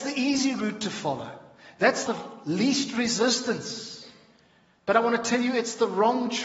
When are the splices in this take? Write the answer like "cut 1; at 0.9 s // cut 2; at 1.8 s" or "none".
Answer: cut 1; at 2.1 s